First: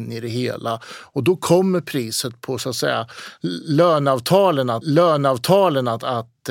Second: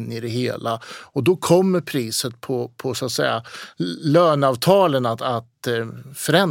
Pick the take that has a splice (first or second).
first